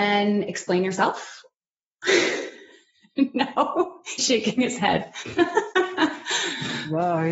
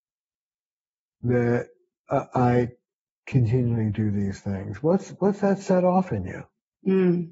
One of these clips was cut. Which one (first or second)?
first